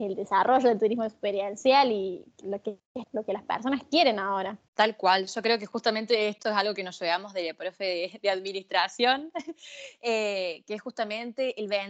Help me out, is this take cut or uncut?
cut